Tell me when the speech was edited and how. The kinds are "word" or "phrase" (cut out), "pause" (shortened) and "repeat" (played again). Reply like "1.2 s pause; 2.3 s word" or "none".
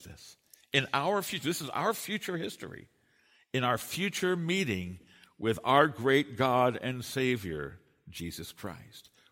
none